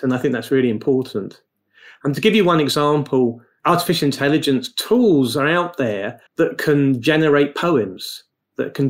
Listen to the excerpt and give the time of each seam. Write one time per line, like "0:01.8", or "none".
0:06.3

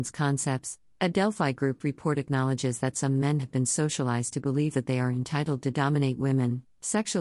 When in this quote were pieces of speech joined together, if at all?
none

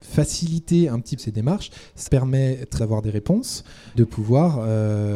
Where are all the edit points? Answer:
0:01.2
0:02.1
0:02.8
0:03.9

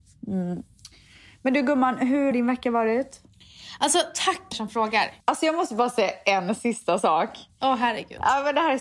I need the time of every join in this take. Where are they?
0:02.3
0:04.5
0:05.2

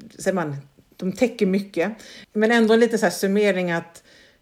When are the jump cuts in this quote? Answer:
0:02.2

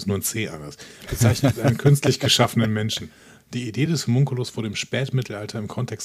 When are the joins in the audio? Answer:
none

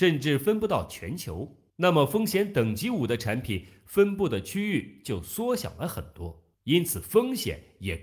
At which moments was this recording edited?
0:01.7
0:06.5

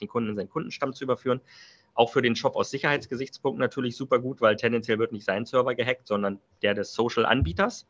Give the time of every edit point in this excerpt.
none

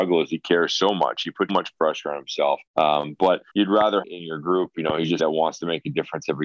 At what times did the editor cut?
0:01.5
0:02.7
0:03.5
0:04.0
0:05.2

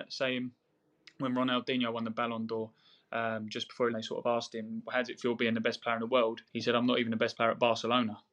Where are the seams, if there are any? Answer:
0:03.9
0:06.5

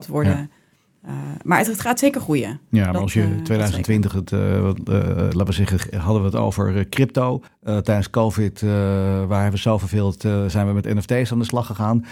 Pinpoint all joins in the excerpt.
0:07.5

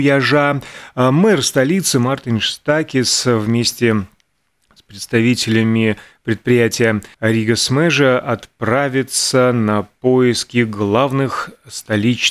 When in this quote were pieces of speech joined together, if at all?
0:07.1

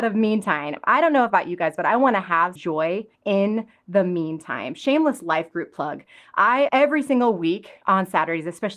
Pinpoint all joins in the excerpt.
0:02.6
0:03.1
0:06.7

